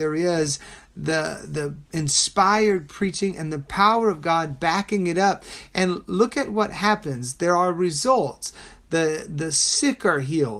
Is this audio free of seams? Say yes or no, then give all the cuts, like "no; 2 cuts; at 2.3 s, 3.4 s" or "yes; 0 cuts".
no; 1 cut; at 1.9 s